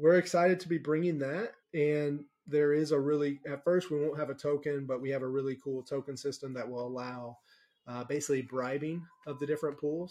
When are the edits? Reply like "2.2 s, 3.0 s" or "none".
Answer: 1.6 s